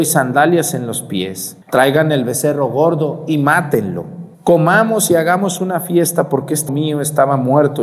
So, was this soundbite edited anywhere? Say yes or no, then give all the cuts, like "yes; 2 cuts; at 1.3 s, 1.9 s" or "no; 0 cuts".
yes; 3 cuts; at 1.6 s, 4.3 s, 6.7 s